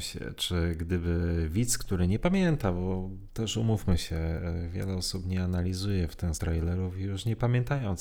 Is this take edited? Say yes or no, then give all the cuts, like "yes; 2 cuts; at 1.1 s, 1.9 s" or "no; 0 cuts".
yes; 1 cut; at 6.3 s